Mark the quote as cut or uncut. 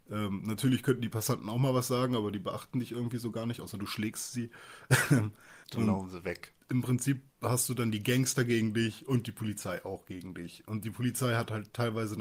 cut